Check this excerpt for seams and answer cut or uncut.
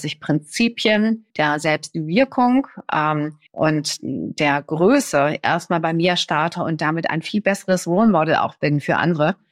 cut